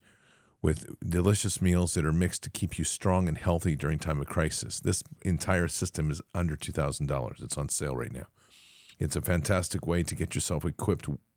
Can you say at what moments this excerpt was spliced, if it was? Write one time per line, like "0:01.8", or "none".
none